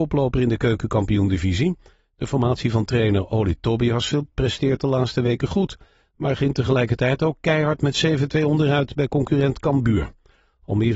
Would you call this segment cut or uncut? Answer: uncut